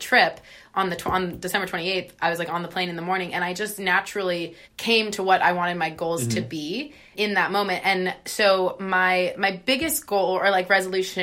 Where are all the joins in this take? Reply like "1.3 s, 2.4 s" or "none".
4.6 s, 7.1 s